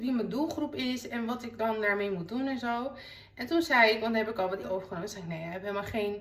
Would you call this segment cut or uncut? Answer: cut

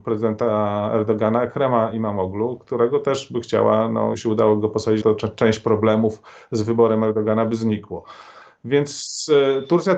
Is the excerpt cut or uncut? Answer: cut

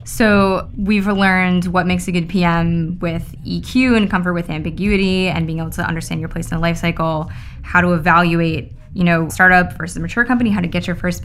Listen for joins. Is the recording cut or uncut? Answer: cut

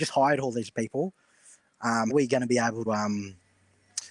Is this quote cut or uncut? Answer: cut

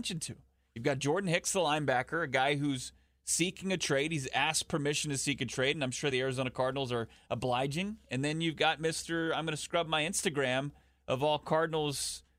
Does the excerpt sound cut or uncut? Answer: uncut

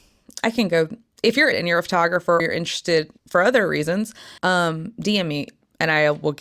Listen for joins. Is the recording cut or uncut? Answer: cut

